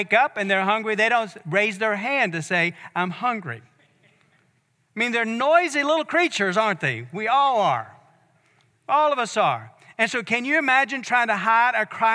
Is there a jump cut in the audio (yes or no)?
no